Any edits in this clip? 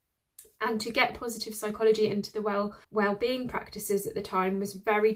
yes; 1 cut; at 2.8 s

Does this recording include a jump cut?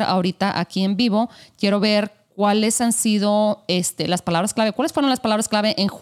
no; 0 cuts

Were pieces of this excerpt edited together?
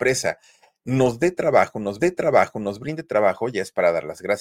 yes; 1 cut; at 2.0 s

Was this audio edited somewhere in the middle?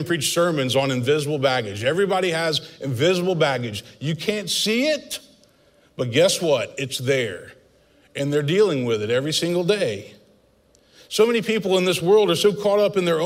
no; 0 cuts

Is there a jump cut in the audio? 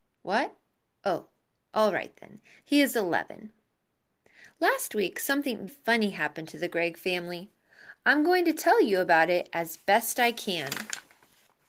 yes; 1 cut; at 5.7 s

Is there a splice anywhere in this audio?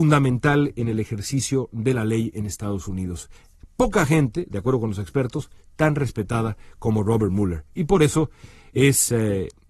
no; 0 cuts

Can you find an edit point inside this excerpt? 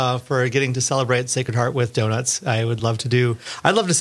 no; 0 cuts

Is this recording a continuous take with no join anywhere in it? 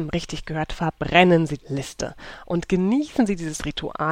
no; 1 cut; at 1.6 s

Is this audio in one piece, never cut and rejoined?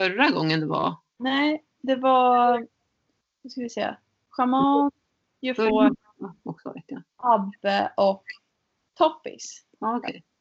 yes; 0 cuts

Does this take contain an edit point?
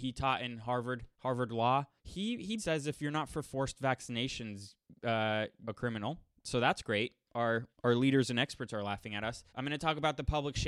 yes; 6 cuts; at 1.1 s, 2.0 s, 2.6 s, 5.6 s, 7.7 s, 9.5 s

